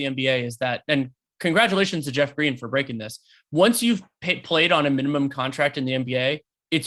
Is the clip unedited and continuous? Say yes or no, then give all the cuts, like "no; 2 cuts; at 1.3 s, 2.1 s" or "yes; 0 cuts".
yes; 0 cuts